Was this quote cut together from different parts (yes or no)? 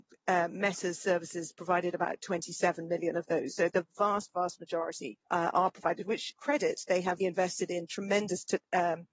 yes